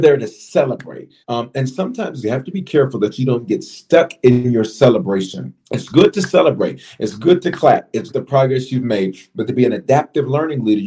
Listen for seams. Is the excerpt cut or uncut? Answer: cut